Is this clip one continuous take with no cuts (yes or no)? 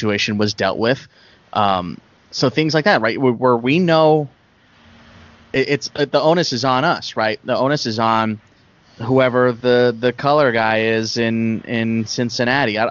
yes